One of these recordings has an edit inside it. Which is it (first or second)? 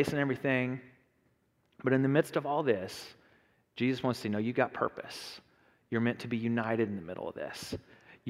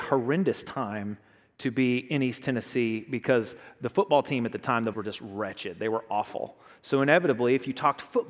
second